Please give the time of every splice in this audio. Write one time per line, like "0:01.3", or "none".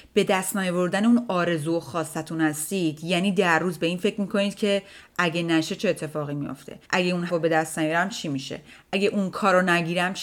0:06.8
0:07.3